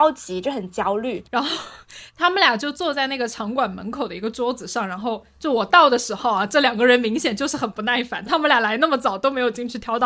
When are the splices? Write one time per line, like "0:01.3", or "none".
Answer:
0:01.3
0:08.3